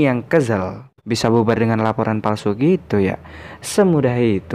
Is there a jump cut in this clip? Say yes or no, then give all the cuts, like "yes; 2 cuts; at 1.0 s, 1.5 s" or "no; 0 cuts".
no; 0 cuts